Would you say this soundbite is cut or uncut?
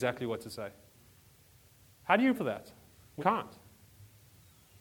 cut